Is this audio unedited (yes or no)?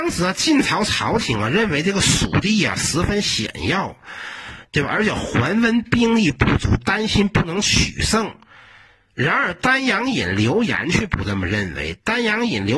yes